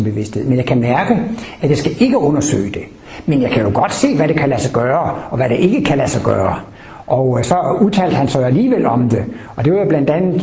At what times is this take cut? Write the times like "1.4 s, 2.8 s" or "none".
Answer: none